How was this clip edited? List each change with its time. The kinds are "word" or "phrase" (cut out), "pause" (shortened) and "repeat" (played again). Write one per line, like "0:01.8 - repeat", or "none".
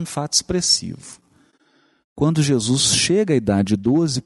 none